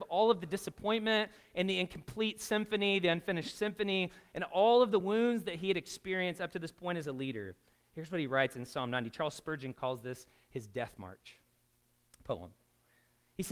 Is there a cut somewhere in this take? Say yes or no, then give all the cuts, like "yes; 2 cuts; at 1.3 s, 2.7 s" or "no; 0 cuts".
no; 0 cuts